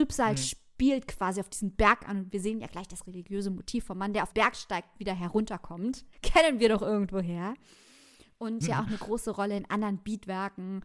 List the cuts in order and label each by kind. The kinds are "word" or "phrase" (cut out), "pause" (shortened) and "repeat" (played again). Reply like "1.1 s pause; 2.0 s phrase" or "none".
4.3 s word; 6.1 s pause; 8.6 s phrase